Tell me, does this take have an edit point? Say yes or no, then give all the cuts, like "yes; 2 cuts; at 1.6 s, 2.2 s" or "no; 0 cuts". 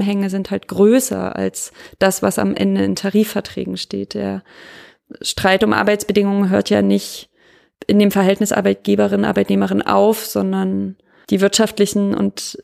no; 0 cuts